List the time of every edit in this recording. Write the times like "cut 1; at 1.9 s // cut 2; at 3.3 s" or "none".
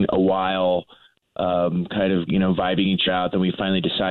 cut 1; at 2.3 s // cut 2; at 3.1 s